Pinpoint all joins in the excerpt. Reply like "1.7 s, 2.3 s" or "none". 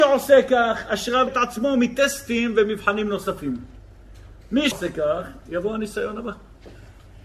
1.3 s, 4.7 s